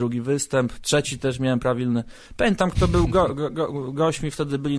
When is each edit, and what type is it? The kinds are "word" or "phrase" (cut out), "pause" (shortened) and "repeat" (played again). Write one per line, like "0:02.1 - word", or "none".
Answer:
none

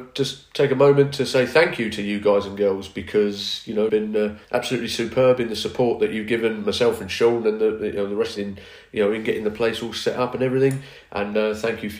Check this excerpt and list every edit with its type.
0:03.9 - word
0:04.4 - pause
0:08.4 - phrase

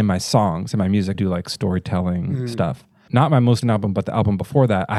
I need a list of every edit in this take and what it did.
0:01.1 - word
0:03.1 - word
0:03.6 - word

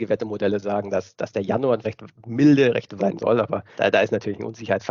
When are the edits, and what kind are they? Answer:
0:01.8 - word
0:03.0 - word
0:03.7 - word

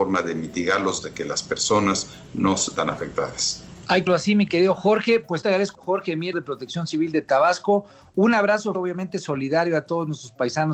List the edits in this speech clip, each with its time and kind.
0:01.0 - word
0:02.8 - word
0:04.1 - word
0:05.4 - word
0:05.7 - word
0:06.3 - word
0:08.7 - word

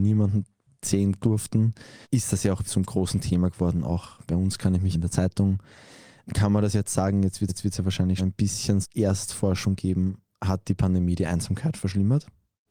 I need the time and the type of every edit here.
0:01.2 - word
0:02.0 - pause
0:02.7 - word
0:04.9 - word
0:07.5 - repeat
0:08.2 - word
0:08.8 - word

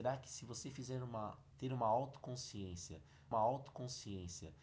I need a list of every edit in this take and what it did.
0:01.5 - word
0:03.3 - repeat

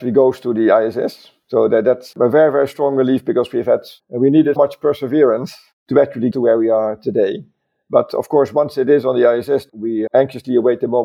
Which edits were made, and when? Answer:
0:04.6 - word
0:06.3 - word
0:10.1 - word

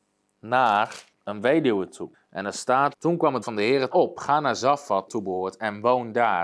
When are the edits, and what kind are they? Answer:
0:01.1 - pause
0:02.1 - pause
0:02.9 - word
0:03.4 - word
0:03.9 - phrase
0:05.1 - phrase

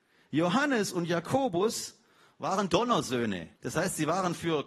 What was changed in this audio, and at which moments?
0:02.7 - word
0:03.6 - pause

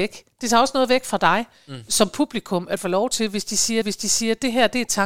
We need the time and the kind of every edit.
0:02.8 - phrase
0:03.8 - repeat

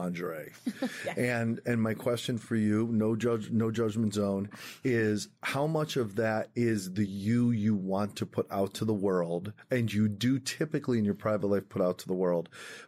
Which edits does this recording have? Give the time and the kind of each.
none

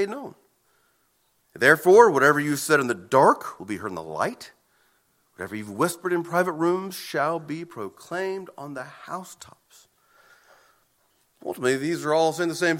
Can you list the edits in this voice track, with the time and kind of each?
none

